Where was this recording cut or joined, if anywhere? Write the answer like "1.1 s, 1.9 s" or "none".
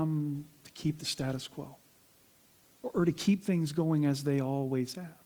none